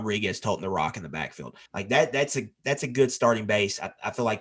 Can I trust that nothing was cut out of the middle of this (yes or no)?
no